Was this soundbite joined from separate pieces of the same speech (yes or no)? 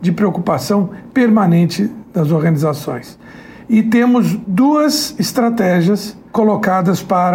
yes